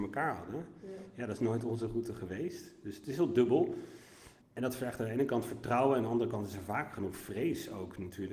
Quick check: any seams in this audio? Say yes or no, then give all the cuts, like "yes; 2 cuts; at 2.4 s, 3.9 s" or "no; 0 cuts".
yes; 1 cut; at 4.4 s